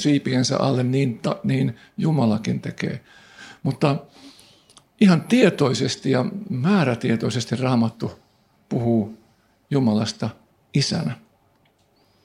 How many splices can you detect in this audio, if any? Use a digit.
0